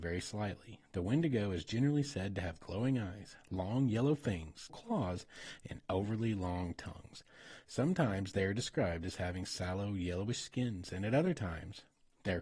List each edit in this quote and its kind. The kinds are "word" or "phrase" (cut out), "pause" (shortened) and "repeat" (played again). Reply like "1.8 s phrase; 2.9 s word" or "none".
4.7 s word